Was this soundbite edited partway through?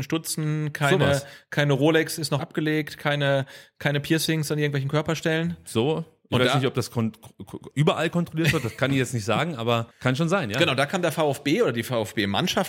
yes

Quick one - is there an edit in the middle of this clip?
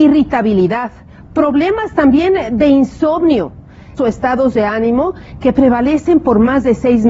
yes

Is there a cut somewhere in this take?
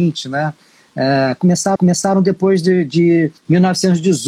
yes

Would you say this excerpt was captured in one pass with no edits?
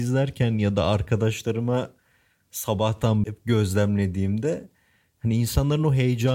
no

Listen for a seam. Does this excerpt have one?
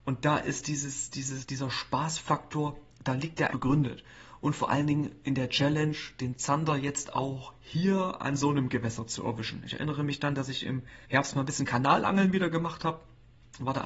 yes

